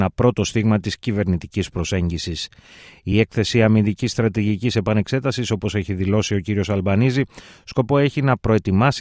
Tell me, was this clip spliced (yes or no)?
no